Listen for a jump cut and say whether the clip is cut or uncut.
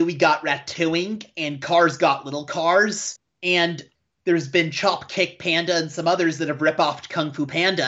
uncut